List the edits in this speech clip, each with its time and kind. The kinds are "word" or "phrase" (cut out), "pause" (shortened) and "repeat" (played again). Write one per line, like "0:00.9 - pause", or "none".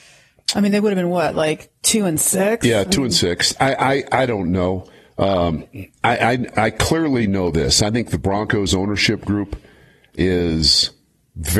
none

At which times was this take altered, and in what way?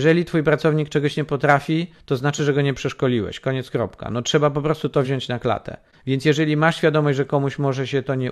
none

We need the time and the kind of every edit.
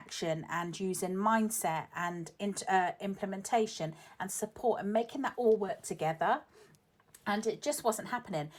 none

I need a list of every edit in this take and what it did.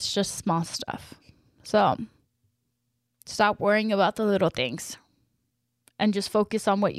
none

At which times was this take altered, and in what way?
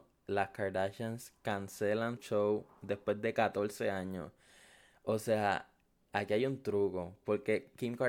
0:02.2 - word
0:06.1 - word

